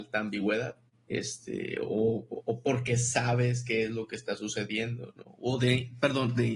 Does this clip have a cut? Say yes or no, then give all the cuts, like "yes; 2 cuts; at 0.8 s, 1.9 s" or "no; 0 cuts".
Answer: no; 0 cuts